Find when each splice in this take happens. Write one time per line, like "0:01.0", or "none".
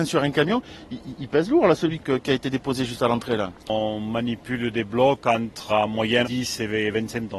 0:01.2
0:02.0
0:03.6
0:05.7
0:06.2